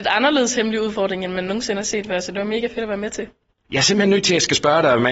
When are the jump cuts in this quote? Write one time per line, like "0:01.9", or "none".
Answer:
none

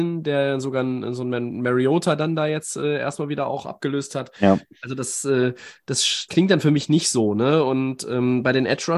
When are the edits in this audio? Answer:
0:06.3

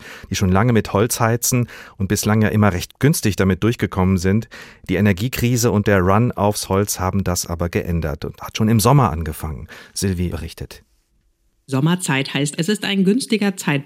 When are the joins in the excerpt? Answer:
0:02.9
0:08.4
0:10.3
0:12.6

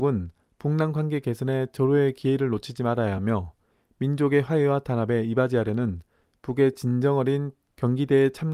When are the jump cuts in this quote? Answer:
none

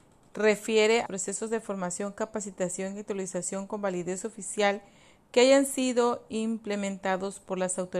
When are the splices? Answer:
0:01.1

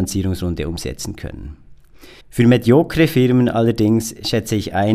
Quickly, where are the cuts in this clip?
0:02.2

